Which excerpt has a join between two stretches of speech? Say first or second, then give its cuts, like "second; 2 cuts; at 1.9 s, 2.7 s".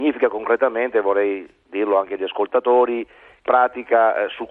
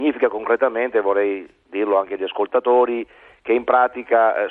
first; 1 cut; at 3.5 s